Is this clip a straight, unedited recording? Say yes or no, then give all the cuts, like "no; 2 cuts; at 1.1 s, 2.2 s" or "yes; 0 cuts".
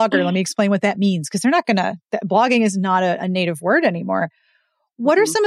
yes; 0 cuts